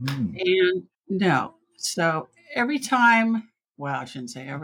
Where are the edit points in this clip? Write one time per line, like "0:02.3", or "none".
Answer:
0:00.9
0:03.6